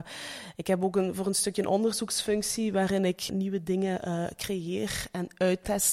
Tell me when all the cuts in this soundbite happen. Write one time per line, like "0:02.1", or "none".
0:03.3